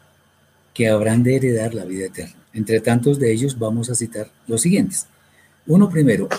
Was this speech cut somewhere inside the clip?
yes; 2 cuts; at 2.4 s, 4.4 s

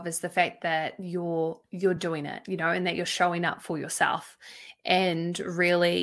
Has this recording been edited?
no; 0 cuts

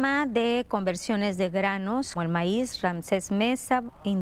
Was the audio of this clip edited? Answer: yes; 1 cut; at 2.2 s

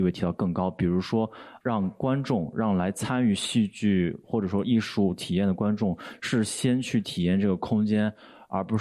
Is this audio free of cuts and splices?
no; 1 cut; at 1.6 s

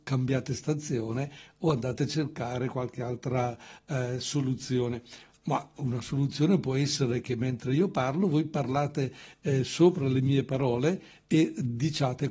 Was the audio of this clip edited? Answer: no; 0 cuts

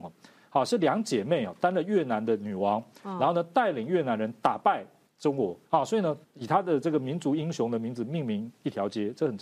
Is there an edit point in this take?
yes; 3 cuts; at 5.1 s, 5.6 s, 6.2 s

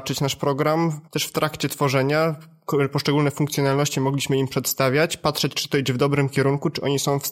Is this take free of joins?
no; 1 cut; at 1.1 s

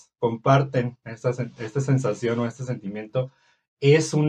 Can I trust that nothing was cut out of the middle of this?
yes; 0 cuts

